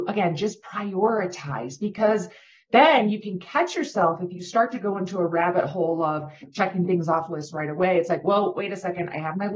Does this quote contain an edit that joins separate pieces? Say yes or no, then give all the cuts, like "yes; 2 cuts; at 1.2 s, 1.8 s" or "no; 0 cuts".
no; 0 cuts